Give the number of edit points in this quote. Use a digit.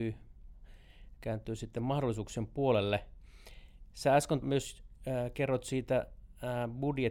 1